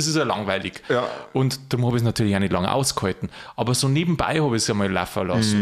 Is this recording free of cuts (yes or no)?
yes